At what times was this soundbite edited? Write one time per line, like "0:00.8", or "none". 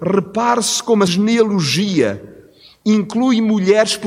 0:01.1